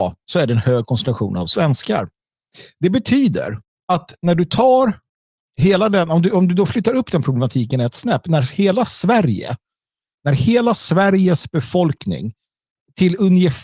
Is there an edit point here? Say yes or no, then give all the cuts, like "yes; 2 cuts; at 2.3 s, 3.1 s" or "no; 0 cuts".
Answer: yes; 1 cut; at 5.5 s